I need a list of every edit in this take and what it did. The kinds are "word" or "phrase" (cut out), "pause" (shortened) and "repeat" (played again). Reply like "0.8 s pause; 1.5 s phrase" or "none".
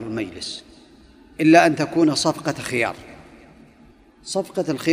none